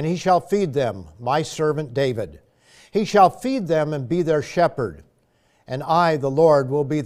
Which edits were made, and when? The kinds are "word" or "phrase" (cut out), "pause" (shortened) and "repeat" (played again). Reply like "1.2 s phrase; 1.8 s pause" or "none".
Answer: none

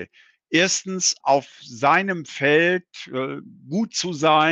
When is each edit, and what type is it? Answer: 1.2 s word

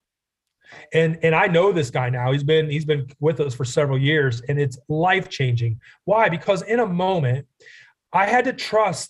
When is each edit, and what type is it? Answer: none

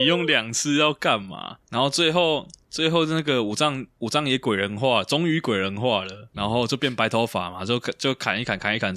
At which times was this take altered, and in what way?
6.3 s word

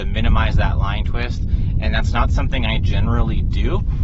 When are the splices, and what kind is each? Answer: none

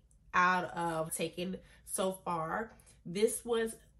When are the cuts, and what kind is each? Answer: 1.1 s phrase

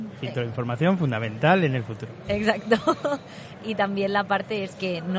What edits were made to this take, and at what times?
3.6 s word

